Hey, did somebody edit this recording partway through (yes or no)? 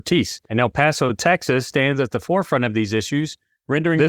no